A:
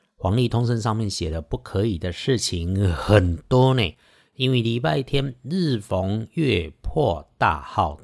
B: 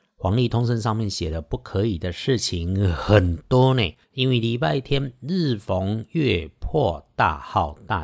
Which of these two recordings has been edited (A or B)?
B